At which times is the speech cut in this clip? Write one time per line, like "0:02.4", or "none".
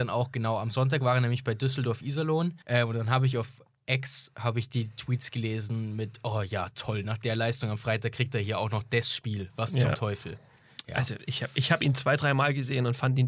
0:02.6